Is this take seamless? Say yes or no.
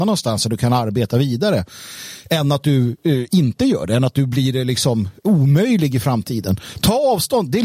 yes